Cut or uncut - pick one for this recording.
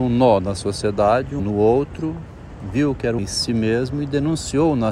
cut